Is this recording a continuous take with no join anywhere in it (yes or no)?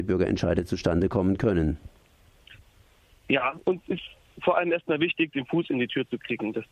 yes